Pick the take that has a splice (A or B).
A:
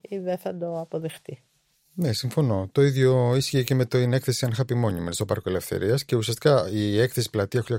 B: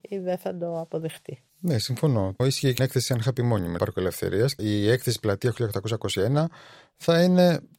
B